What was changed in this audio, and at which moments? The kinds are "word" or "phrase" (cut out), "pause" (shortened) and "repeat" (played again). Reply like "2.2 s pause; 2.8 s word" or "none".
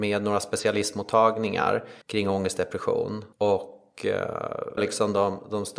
2.0 s pause; 3.3 s pause; 4.8 s word